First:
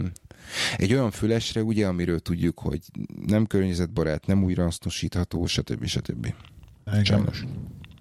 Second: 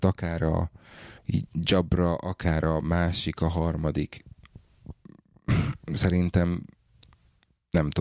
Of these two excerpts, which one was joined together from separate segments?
second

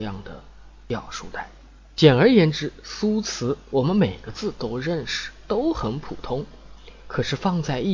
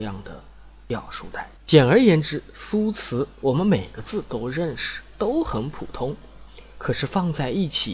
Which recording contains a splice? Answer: second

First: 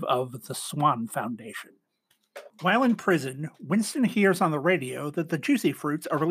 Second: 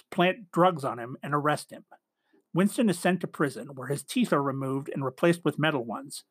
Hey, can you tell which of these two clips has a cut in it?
first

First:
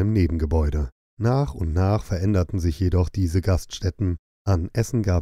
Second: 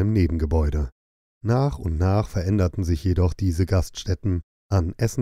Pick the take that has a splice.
first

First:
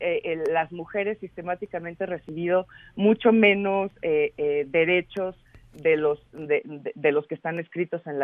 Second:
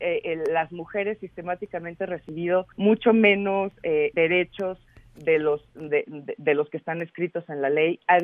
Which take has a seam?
second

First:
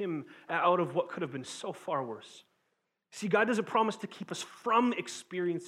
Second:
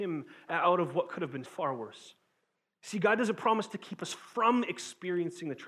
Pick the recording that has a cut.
second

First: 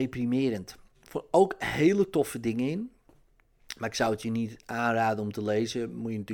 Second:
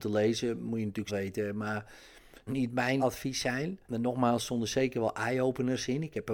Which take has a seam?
second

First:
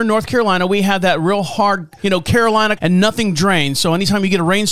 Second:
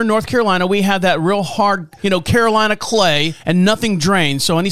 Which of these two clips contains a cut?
first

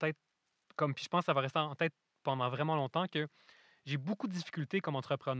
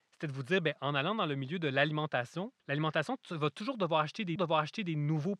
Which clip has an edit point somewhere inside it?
second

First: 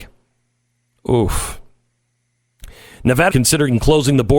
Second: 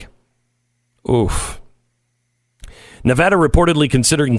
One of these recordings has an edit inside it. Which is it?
first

